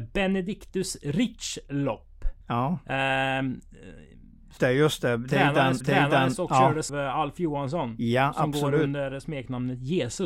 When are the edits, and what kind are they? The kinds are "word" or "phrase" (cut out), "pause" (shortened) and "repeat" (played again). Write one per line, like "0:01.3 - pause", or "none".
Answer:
0:02.4 - pause
0:04.6 - word
0:05.8 - repeat
0:06.9 - word

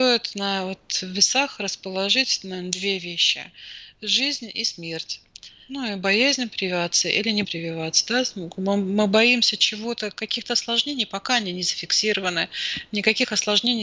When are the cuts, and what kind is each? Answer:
0:07.4 - word

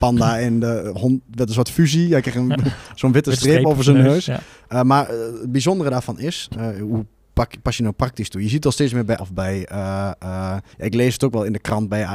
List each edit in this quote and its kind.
0:09.2 - word
0:10.7 - pause

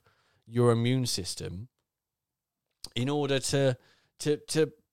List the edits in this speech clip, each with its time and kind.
none

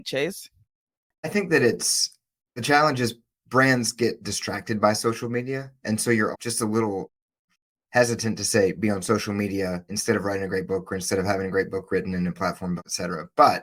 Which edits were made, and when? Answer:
0:02.4 - word
0:06.3 - word

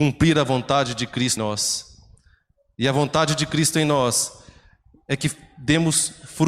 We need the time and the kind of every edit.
0:01.4 - word

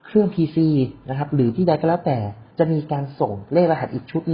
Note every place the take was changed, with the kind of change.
0:02.5 - pause

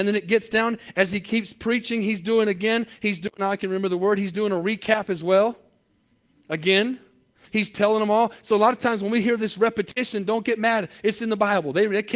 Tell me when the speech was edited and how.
0:07.5 - word

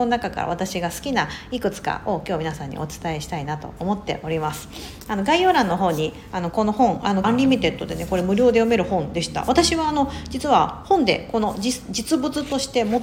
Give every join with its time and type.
0:07.2 - word

